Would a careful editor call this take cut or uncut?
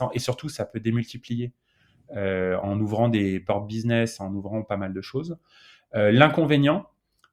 uncut